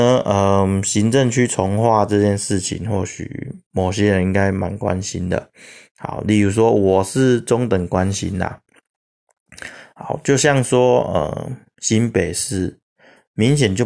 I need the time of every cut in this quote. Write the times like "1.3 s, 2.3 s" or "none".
none